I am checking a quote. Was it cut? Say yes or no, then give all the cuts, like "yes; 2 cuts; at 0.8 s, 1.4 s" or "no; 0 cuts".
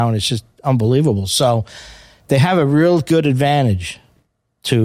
no; 0 cuts